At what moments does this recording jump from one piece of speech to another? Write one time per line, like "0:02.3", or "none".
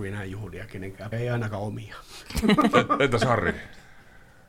0:01.1